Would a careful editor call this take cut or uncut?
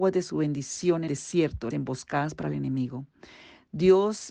cut